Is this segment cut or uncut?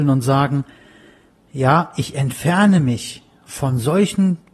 uncut